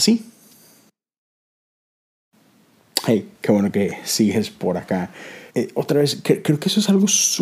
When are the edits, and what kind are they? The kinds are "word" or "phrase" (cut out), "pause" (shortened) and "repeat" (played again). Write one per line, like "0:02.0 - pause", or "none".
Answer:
0:05.5 - pause